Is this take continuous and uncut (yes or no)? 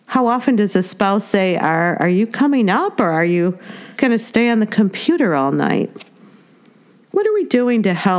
no